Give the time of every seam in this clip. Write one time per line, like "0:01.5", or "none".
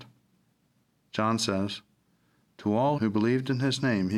0:03.0